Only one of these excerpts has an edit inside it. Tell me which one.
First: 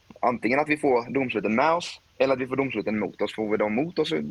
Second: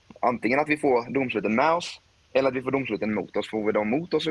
first; 1 cut; at 2.1 s

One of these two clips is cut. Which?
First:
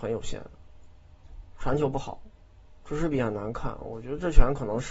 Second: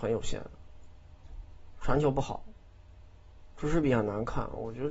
first; 2 cuts; at 1.5 s, 2.6 s

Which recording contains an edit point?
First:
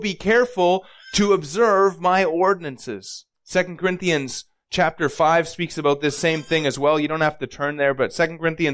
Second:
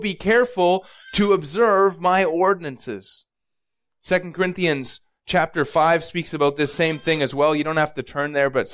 first; 1 cut; at 3.3 s

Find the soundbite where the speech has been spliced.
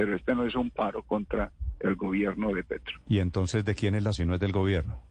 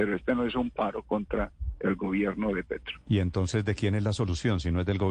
first; 1 cut; at 4.1 s

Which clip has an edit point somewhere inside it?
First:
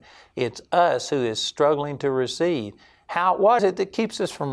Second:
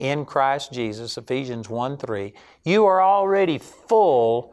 first; 1 cut; at 3.6 s

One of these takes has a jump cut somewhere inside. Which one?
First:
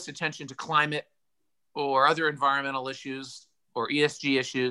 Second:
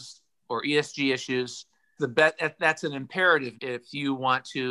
second; 2 cuts; at 2.0 s, 3.5 s

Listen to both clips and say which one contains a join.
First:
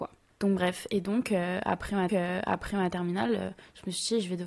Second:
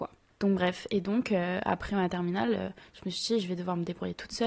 first; 1 cut; at 2.1 s

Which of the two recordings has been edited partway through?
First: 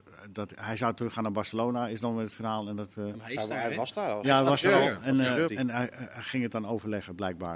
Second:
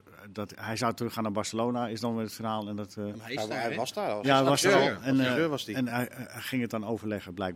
first; 1 cut; at 5.5 s

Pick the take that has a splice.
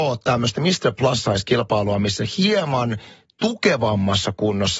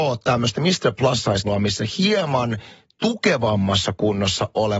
second; 1 cut; at 1.4 s

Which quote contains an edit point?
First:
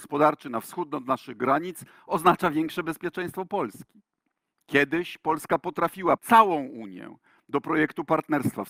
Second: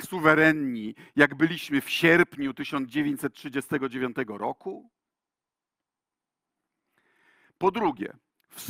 first; 1 cut; at 6.2 s

